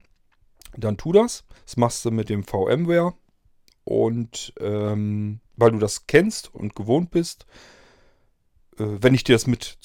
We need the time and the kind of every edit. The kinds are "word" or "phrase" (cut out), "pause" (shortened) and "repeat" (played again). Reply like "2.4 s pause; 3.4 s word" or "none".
1.6 s pause; 5.4 s pause